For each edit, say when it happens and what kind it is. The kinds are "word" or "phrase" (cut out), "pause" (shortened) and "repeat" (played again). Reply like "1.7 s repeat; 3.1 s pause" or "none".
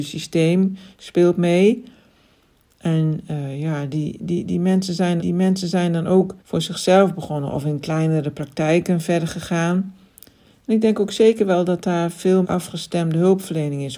5.2 s repeat; 6.4 s pause; 12.4 s word